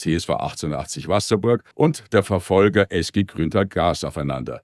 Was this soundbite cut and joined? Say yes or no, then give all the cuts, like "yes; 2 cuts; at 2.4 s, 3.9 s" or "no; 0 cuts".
yes; 1 cut; at 1.7 s